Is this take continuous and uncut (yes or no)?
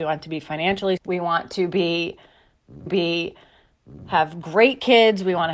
no